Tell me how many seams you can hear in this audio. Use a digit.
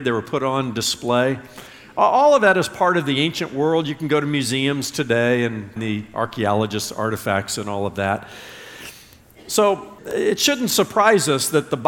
2